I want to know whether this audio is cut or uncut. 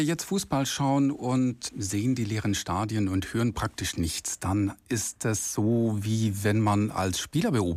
uncut